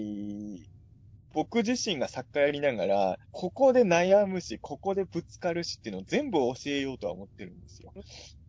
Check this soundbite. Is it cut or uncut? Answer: cut